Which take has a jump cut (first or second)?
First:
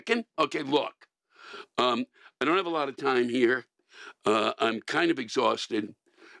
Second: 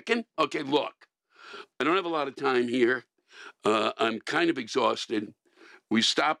second